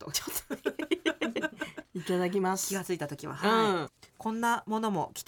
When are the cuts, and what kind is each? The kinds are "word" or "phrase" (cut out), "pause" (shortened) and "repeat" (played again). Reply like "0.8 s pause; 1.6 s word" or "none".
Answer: 4.1 s pause